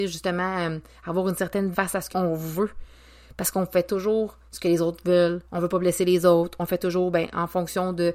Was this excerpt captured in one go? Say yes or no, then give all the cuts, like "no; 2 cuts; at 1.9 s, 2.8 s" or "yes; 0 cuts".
no; 4 cuts; at 1.7 s, 2.1 s, 4.5 s, 5.4 s